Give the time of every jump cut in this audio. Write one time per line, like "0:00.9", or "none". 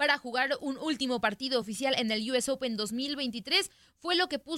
none